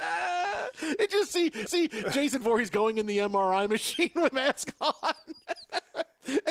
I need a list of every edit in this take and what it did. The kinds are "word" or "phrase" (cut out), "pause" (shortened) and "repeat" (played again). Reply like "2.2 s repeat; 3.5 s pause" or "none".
1.7 s repeat; 4.3 s phrase